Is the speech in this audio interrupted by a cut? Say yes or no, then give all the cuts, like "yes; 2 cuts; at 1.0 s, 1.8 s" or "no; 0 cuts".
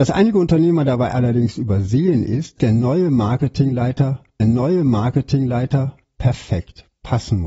yes; 2 cuts; at 2.6 s, 4.4 s